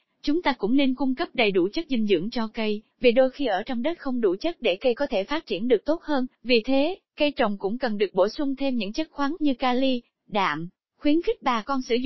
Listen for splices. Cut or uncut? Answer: cut